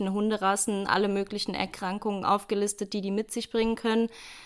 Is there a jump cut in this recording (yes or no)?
no